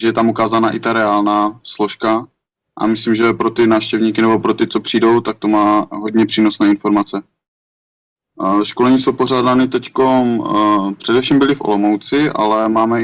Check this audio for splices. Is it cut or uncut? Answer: uncut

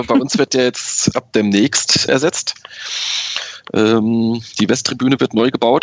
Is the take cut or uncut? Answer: cut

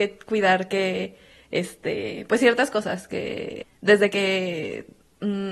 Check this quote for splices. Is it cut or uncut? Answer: uncut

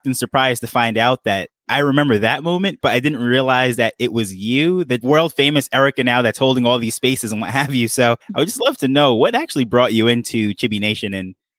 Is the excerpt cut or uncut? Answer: cut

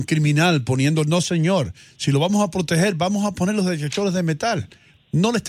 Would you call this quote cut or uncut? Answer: uncut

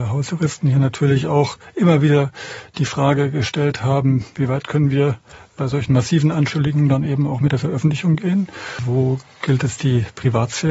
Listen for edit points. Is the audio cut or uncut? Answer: uncut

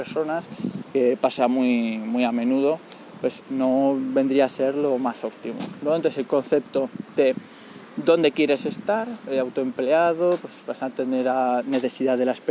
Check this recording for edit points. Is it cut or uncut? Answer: uncut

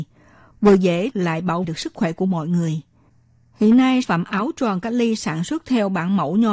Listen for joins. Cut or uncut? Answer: cut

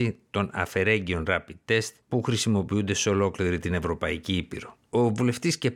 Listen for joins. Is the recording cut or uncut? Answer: cut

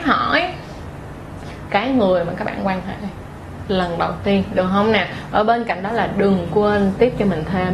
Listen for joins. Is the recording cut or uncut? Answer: uncut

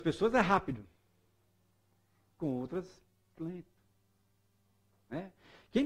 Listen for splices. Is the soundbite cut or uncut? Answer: cut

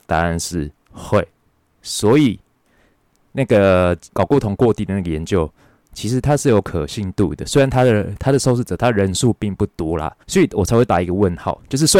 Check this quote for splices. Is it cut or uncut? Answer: cut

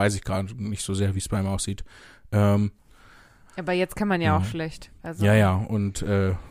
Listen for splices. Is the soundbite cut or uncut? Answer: uncut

